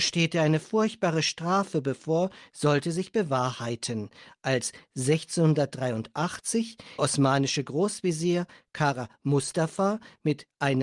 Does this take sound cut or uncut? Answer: cut